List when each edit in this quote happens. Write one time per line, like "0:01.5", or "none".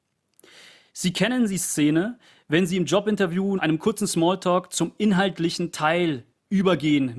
0:03.6